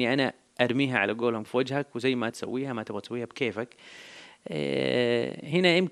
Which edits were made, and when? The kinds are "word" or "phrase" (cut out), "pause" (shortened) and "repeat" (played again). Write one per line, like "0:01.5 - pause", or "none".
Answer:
0:01.4 - word
0:02.3 - word